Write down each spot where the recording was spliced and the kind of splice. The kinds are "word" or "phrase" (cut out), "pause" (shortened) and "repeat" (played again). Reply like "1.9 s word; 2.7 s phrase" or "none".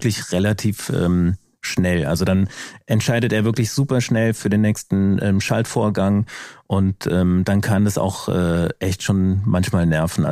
none